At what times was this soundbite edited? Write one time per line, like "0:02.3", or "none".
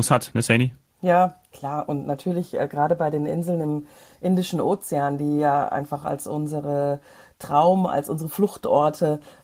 none

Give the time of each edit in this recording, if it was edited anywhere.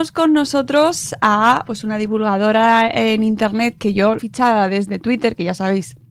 0:01.6
0:04.2

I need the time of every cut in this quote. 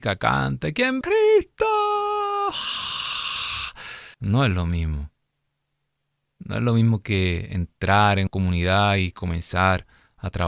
0:01.0
0:04.1
0:08.3

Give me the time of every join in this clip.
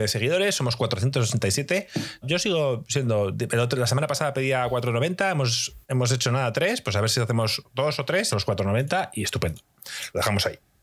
0:02.2
0:05.8
0:08.3

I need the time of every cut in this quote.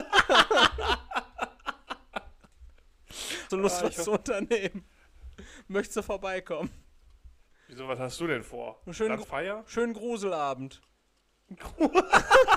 0:03.5
0:09.2

